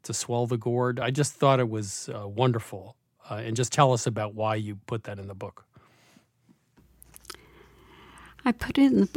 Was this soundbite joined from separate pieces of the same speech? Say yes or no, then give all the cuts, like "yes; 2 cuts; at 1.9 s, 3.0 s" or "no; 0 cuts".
no; 0 cuts